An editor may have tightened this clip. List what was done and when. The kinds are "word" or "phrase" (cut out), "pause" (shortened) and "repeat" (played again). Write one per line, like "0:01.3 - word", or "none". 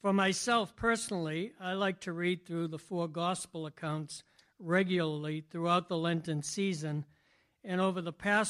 none